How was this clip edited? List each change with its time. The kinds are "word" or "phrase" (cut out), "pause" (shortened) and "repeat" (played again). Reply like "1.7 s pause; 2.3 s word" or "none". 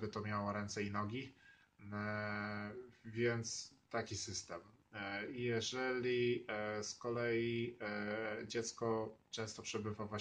none